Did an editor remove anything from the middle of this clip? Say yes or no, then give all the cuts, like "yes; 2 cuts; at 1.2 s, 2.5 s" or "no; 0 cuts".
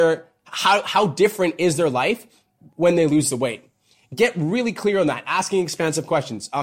no; 0 cuts